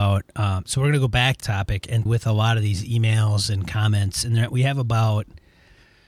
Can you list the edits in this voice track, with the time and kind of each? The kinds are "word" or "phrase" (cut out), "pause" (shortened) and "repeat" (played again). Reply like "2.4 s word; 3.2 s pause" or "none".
1.4 s word; 2.1 s word